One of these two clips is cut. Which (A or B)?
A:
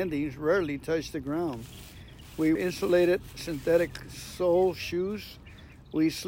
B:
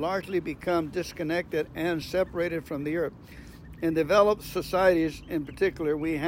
A